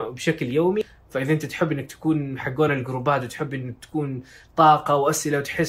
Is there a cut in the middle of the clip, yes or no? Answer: no